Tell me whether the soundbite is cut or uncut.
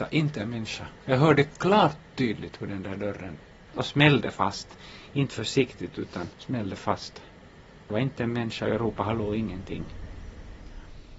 cut